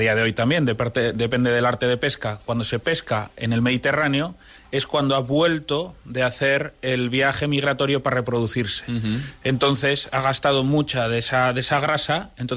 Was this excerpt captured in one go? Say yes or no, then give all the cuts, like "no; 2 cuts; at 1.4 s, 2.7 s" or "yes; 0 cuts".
yes; 0 cuts